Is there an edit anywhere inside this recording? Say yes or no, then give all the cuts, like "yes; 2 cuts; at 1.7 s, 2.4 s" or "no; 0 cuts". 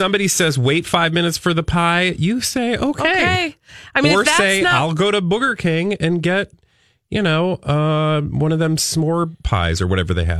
no; 0 cuts